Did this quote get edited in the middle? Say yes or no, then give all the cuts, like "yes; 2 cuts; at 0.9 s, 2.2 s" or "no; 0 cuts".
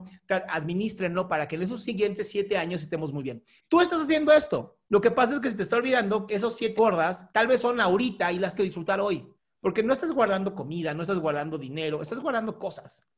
yes; 7 cuts; at 3.6 s, 4.8 s, 6.3 s, 6.8 s, 7.3 s, 8.6 s, 9.3 s